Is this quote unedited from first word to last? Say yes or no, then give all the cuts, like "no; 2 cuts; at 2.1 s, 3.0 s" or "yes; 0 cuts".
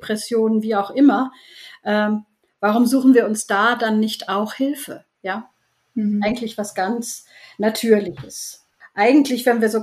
yes; 0 cuts